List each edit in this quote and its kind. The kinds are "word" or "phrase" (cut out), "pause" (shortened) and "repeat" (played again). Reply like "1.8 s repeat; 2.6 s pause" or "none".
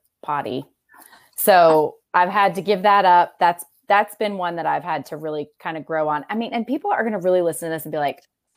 none